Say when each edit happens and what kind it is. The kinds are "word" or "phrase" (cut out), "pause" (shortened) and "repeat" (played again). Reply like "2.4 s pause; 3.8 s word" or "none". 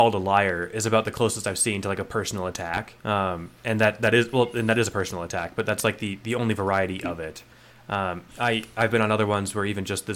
3.0 s pause; 8.3 s pause